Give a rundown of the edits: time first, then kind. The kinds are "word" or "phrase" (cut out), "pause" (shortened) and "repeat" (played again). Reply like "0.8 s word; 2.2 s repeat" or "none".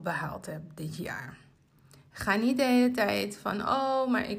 none